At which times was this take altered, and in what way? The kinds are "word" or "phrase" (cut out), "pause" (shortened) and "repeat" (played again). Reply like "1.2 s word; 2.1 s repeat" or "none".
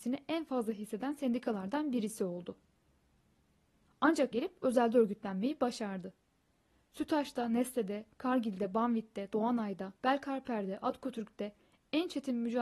4.3 s word; 10.0 s pause